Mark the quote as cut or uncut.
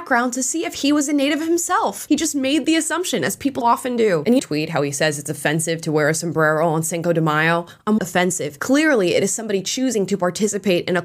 cut